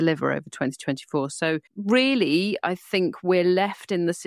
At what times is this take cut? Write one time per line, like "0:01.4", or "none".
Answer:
0:01.7